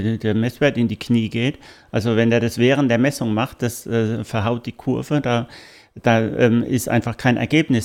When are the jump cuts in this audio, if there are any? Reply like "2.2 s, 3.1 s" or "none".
none